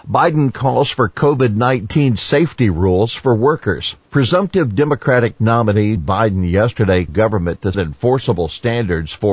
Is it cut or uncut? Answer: cut